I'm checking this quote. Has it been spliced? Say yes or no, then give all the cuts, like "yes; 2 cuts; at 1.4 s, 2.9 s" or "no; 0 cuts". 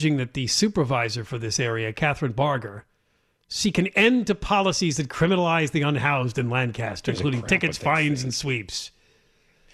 no; 0 cuts